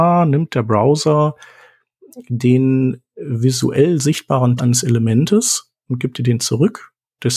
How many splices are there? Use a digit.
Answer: 1